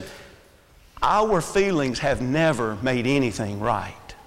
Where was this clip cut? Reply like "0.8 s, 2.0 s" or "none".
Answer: none

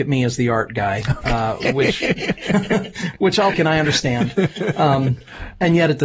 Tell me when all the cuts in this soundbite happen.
3.5 s

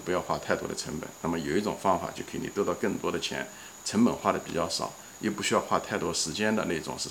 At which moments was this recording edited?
none

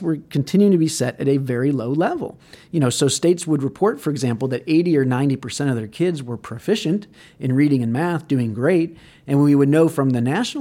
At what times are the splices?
none

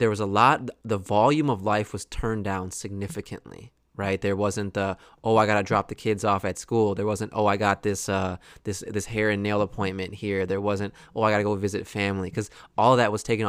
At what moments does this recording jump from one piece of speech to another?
none

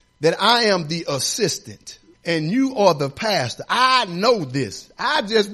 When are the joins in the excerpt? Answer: 2.1 s

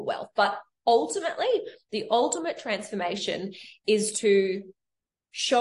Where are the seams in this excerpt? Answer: none

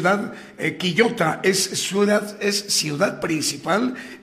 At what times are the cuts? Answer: none

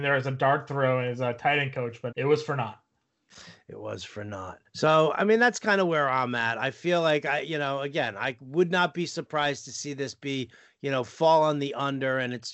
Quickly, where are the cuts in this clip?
2.1 s, 4.7 s

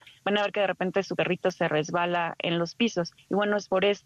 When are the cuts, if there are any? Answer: none

